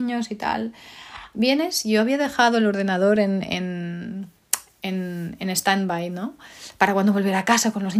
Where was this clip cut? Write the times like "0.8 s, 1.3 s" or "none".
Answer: none